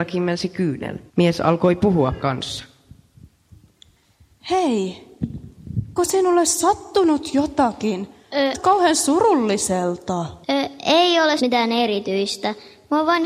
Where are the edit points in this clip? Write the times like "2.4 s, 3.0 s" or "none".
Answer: 1.1 s, 2.2 s, 6.0 s, 8.5 s, 10.4 s, 11.4 s